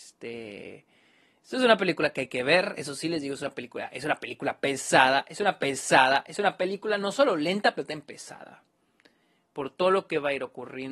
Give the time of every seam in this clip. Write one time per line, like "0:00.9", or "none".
0:05.6